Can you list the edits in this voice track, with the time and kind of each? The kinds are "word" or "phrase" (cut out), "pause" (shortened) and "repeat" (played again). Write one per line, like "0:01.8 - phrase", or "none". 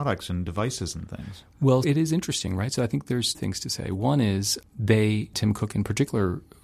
0:01.8 - word
0:03.3 - word
0:05.3 - word